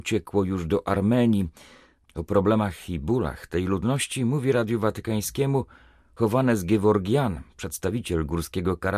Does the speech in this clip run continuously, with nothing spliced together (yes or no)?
yes